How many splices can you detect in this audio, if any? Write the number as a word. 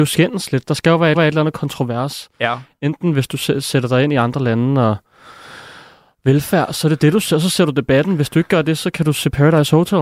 one